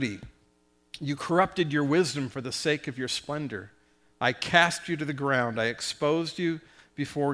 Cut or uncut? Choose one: uncut